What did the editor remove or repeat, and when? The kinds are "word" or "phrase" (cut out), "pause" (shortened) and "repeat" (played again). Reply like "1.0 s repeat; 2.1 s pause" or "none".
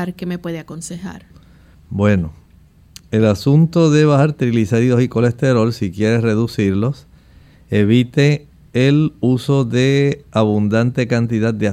none